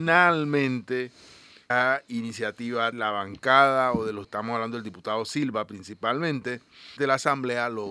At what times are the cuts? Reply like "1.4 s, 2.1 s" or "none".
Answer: 1.7 s, 2.9 s, 4.2 s, 7.0 s